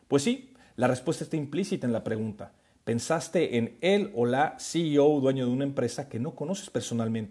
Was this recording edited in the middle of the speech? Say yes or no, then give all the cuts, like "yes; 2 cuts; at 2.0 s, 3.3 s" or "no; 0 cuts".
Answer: no; 0 cuts